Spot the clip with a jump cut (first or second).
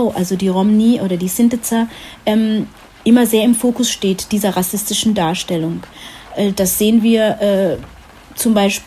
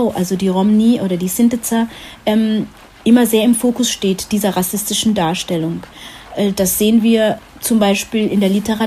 second